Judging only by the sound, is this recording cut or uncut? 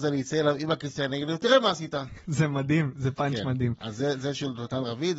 uncut